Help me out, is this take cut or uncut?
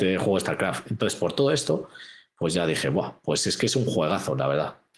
uncut